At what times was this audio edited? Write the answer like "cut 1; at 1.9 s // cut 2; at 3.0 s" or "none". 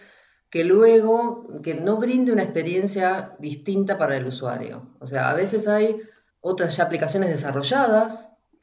none